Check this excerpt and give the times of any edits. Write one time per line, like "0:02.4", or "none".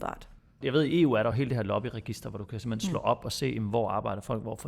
none